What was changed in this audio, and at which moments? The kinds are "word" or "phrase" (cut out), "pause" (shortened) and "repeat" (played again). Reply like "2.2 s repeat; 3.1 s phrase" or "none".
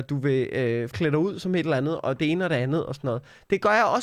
0.9 s word